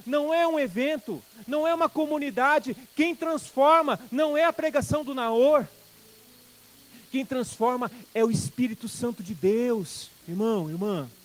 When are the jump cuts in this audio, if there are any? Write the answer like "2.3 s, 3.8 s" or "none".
none